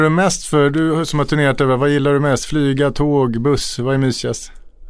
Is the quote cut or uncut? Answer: uncut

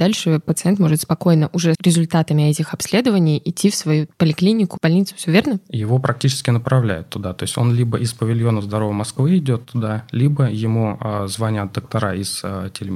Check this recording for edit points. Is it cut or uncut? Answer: cut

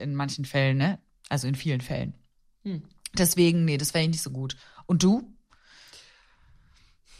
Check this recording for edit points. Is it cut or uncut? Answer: uncut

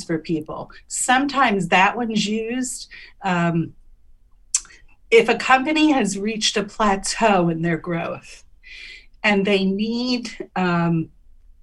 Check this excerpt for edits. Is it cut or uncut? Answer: uncut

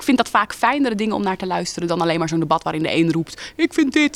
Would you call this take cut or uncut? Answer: uncut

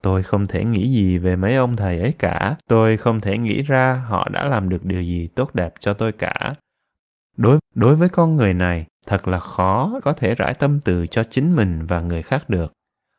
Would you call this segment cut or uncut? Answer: cut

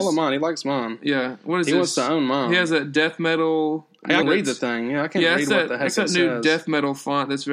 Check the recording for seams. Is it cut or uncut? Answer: cut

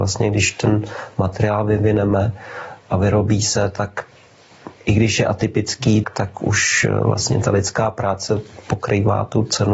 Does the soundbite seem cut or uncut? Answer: cut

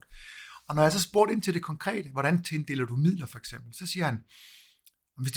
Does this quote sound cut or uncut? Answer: uncut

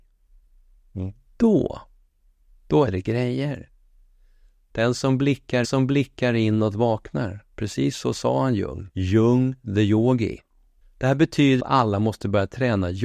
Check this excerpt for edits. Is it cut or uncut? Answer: cut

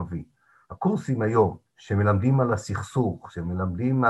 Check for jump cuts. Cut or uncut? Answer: cut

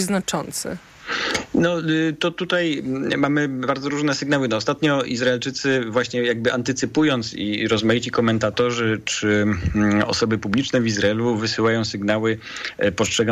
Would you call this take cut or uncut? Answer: uncut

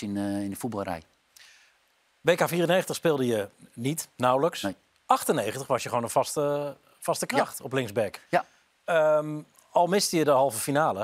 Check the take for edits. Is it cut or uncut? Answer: uncut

